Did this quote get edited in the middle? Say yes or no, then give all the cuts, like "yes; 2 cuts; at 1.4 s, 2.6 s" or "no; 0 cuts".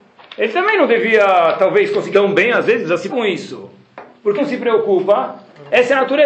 yes; 3 cuts; at 2.1 s, 3.1 s, 4.4 s